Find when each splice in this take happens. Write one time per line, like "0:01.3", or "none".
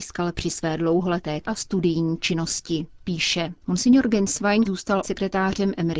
0:01.4
0:03.6
0:04.6
0:05.0